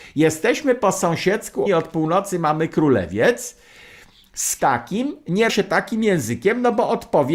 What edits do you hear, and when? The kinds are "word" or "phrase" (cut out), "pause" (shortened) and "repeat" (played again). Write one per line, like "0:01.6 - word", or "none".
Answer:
0:01.7 - word
0:04.6 - word
0:05.5 - word